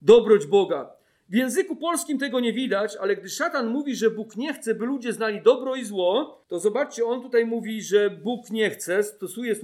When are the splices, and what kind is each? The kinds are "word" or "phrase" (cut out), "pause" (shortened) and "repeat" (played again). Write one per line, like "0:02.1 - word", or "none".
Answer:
0:06.4 - pause